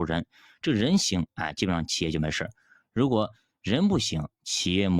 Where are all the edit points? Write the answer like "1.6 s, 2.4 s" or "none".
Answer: none